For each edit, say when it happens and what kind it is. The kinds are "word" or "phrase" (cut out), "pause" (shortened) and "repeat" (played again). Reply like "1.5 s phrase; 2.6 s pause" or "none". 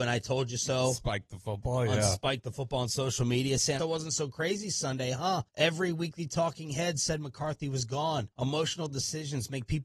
3.8 s phrase; 5.5 s pause; 8.3 s pause